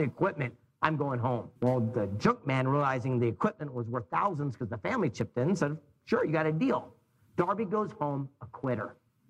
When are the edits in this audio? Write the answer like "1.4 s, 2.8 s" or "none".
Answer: 1.6 s